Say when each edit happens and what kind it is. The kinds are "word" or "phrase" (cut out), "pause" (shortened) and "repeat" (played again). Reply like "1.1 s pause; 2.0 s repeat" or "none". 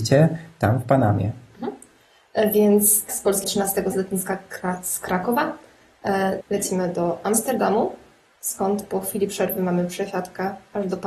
3.1 s word; 3.4 s word; 3.9 s word; 6.4 s word

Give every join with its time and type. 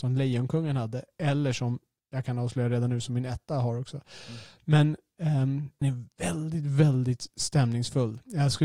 5.8 s word

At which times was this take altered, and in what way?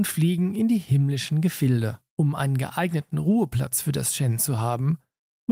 2.1 s pause

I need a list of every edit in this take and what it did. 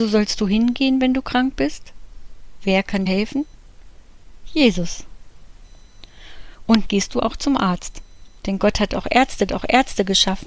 3.1 s word; 6.8 s word; 8.4 s pause; 9.5 s repeat

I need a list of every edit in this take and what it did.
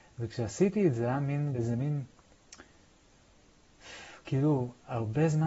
1.0 s word; 1.5 s word

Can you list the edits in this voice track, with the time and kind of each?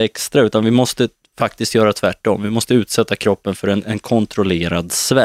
none

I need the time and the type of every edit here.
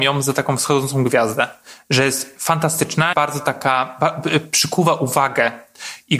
3.1 s word

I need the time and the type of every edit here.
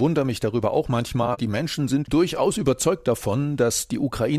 1.4 s word; 2.1 s word

